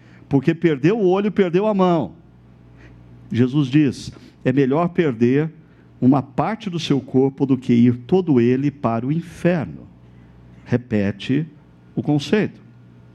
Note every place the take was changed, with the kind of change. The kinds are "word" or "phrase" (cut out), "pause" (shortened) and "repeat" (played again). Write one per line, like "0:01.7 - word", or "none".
none